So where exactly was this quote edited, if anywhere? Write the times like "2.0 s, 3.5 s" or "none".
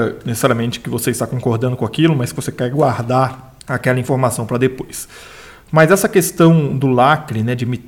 3.6 s